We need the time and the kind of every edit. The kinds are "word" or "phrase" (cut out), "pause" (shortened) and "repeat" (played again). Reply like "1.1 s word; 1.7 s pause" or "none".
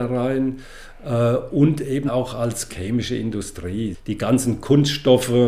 2.1 s word; 2.7 s phrase